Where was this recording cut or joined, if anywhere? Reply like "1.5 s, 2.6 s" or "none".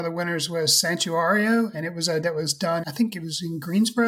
2.2 s, 2.8 s